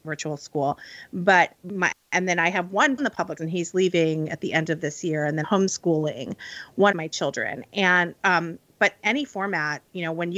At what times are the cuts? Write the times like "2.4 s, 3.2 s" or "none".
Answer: 1.5 s, 3.0 s, 3.4 s, 5.4 s, 6.9 s, 8.1 s, 9.0 s